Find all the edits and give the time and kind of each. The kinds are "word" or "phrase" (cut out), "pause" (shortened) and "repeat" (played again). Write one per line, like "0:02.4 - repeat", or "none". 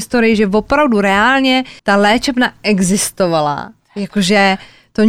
0:01.8 - pause